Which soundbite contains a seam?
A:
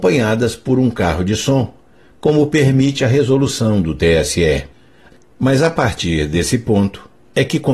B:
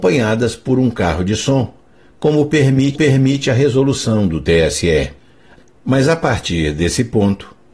B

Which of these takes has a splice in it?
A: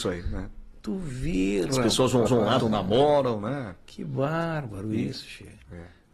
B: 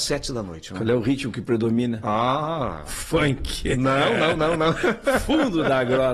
A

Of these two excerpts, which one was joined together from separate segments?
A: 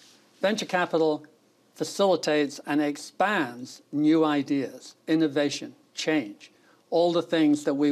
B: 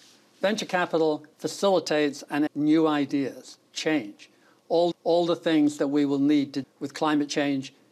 B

